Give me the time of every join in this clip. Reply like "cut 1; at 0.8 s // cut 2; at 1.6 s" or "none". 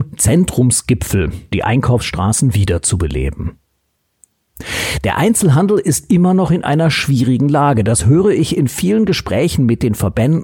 cut 1; at 1.5 s